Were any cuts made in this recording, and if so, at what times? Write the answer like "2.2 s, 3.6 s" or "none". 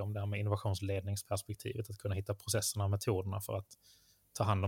none